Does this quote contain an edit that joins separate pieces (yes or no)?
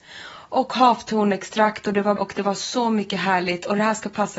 yes